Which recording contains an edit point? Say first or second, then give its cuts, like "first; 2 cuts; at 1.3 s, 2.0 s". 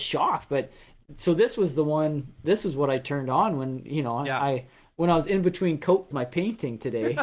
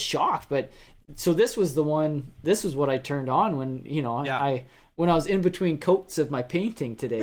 first; 1 cut; at 6.1 s